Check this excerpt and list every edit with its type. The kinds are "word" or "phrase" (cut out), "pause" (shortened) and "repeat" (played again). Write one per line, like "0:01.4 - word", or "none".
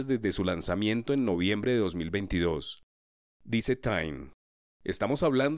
none